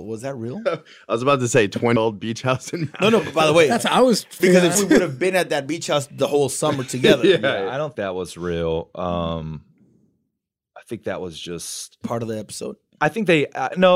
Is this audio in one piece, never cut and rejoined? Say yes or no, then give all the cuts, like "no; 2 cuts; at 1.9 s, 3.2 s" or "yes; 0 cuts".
no; 5 cuts; at 2.0 s, 4.4 s, 4.7 s, 7.9 s, 12.0 s